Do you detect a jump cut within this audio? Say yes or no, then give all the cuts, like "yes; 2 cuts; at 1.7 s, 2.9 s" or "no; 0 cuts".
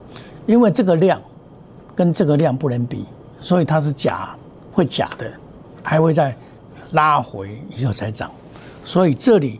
no; 0 cuts